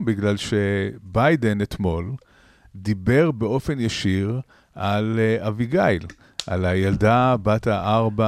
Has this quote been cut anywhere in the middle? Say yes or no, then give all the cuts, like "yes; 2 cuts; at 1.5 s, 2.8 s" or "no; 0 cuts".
no; 0 cuts